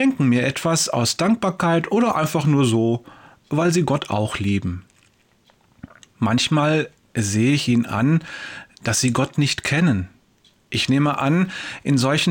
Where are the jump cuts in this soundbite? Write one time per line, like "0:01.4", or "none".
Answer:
none